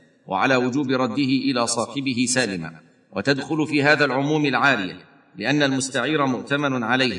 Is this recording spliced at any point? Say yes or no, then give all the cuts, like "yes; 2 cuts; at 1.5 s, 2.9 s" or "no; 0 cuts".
no; 0 cuts